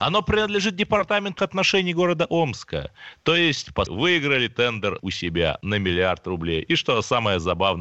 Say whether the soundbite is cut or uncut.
cut